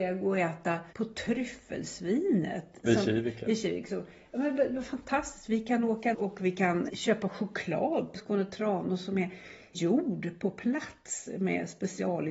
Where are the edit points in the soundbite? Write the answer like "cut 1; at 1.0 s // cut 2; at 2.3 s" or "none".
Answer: cut 1; at 0.9 s // cut 2; at 6.1 s // cut 3; at 6.9 s // cut 4; at 8.1 s // cut 5; at 9.7 s